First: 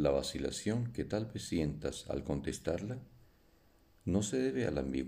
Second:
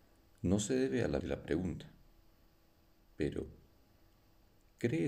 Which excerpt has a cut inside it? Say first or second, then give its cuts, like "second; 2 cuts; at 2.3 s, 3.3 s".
second; 1 cut; at 1.2 s